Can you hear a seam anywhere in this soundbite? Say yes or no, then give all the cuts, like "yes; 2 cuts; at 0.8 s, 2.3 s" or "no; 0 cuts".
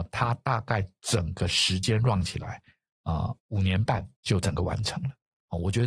yes; 2 cuts; at 3.4 s, 4.1 s